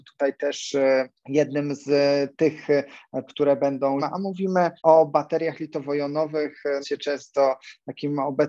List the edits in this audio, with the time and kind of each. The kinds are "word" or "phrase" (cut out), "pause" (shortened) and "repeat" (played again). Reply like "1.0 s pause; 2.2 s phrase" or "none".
1.2 s pause; 3.3 s word; 4.0 s word; 4.8 s pause; 6.8 s word